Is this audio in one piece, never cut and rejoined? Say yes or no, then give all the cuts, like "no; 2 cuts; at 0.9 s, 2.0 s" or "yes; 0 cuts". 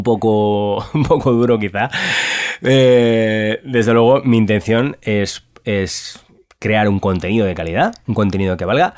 yes; 0 cuts